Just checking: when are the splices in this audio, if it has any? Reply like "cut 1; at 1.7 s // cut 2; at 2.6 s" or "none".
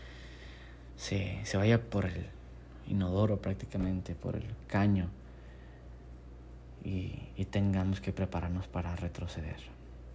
none